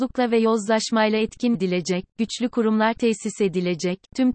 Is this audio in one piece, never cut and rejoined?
no; 1 cut; at 1.5 s

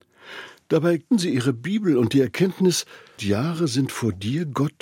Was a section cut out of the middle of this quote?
yes; 2 cuts; at 1.1 s, 3.2 s

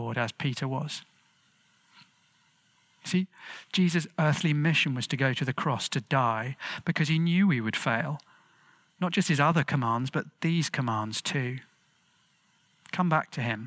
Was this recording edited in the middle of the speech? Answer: no; 0 cuts

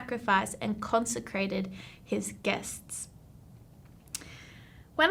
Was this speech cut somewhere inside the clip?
no; 0 cuts

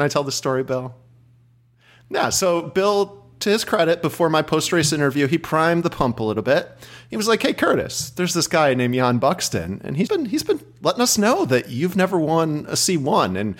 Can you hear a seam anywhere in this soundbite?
yes; 1 cut; at 10.1 s

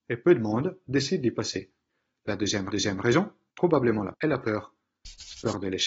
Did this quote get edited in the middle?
yes; 3 cuts; at 1.9 s, 2.7 s, 4.1 s

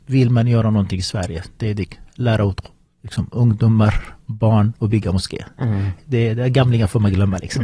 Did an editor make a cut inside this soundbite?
no; 0 cuts

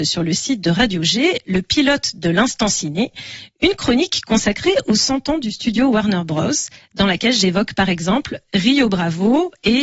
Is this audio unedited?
yes; 0 cuts

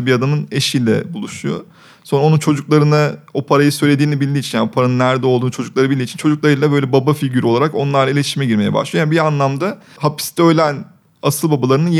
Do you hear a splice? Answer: no; 0 cuts

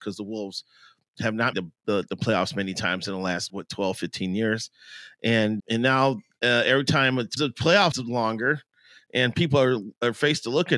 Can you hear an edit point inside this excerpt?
yes; 5 cuts; at 1.5 s, 3.5 s, 5.6 s, 7.4 s, 7.9 s

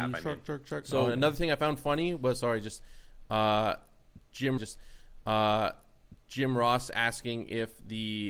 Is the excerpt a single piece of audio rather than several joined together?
no; 1 cut; at 4.6 s

